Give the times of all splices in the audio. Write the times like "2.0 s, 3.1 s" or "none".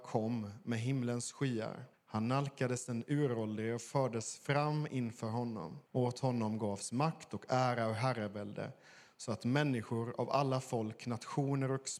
1.9 s, 5.9 s